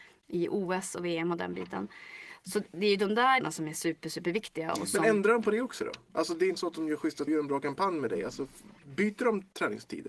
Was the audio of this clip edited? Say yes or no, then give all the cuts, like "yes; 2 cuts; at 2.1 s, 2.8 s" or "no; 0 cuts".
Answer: yes; 3 cuts; at 3.4 s, 6.6 s, 7.3 s